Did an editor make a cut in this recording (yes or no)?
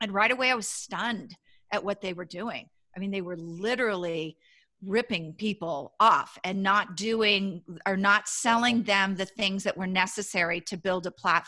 no